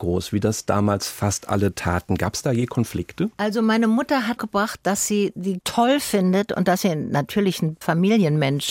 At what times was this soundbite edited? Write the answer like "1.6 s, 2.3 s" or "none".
3.3 s, 4.4 s, 5.6 s, 7.8 s